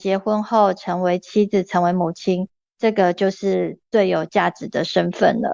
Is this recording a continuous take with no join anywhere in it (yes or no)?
yes